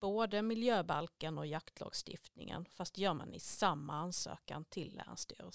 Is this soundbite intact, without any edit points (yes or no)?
yes